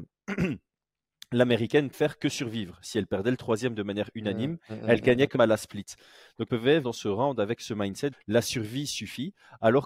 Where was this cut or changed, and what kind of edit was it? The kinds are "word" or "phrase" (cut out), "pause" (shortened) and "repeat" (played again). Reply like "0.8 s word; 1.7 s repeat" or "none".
1.9 s word; 5.3 s word; 6.5 s word; 6.8 s word; 8.1 s word